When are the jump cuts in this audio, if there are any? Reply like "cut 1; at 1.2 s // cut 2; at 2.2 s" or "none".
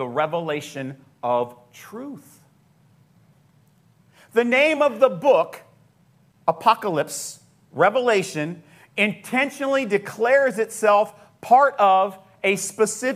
none